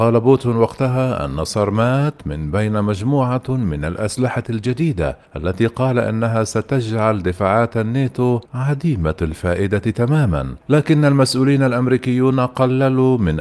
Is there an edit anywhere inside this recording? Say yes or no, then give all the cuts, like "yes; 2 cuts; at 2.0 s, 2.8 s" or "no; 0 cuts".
yes; 3 cuts; at 5.3 s, 8.5 s, 10.6 s